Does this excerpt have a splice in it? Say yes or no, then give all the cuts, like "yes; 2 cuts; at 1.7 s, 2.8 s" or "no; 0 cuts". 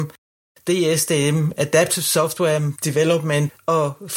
no; 0 cuts